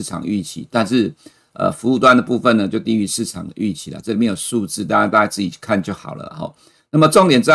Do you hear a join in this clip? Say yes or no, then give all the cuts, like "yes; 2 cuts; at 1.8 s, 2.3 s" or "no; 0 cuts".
no; 0 cuts